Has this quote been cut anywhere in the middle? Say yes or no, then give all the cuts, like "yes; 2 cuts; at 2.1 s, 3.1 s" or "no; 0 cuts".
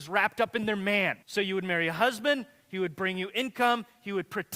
yes; 1 cut; at 1.2 s